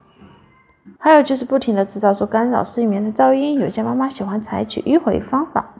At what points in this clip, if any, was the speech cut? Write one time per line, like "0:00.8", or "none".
0:01.0